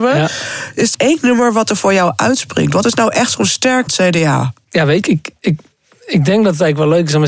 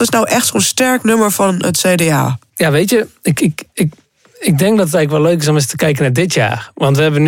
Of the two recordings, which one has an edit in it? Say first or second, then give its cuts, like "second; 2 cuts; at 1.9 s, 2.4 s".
first; 3 cuts; at 0.9 s, 3.9 s, 5.0 s